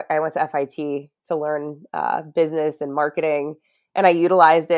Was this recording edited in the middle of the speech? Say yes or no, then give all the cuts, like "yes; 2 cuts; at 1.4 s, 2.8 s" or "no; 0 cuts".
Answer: no; 0 cuts